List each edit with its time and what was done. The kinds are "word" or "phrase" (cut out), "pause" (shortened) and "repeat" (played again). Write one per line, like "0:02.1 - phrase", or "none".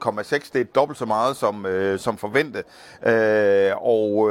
none